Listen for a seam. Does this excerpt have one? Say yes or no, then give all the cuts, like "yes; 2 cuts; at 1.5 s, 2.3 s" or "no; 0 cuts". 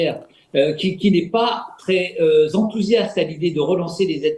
no; 0 cuts